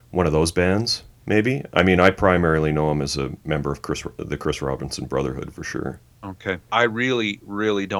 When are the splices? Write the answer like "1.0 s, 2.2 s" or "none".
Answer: none